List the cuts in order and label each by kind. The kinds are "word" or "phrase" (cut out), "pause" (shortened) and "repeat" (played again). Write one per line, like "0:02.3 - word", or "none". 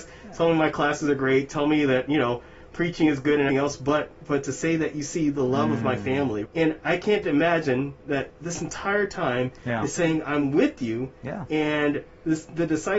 0:03.5 - word
0:06.5 - word
0:08.3 - word